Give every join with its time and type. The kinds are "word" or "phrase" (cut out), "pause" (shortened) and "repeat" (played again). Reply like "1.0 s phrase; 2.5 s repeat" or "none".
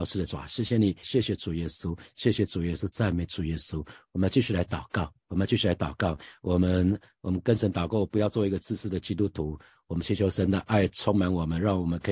1.0 s phrase